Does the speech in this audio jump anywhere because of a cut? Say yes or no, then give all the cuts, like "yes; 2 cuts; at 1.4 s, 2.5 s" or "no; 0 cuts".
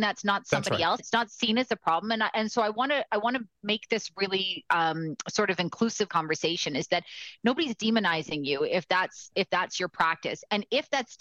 yes; 2 cuts; at 1.0 s, 6.1 s